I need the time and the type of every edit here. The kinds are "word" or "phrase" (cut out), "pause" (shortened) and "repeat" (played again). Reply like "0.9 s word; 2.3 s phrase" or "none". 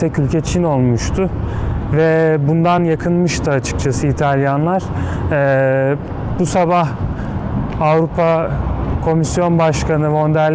none